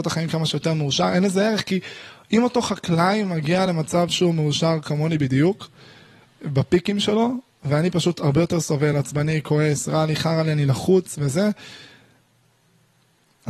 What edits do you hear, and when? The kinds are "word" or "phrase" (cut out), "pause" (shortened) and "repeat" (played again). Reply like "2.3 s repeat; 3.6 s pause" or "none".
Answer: none